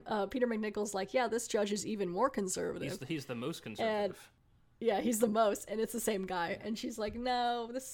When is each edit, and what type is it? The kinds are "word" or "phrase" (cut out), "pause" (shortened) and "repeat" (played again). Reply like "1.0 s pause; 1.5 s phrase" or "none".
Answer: none